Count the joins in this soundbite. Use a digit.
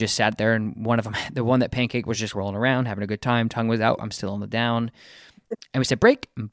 0